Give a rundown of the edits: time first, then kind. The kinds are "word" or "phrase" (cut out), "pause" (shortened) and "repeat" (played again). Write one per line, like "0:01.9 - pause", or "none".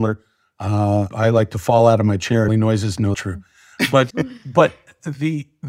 0:01.1 - word
0:02.5 - phrase
0:03.1 - phrase
0:04.1 - word